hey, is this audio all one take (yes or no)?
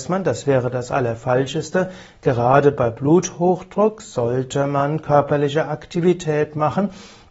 yes